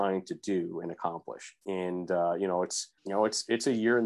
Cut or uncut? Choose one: cut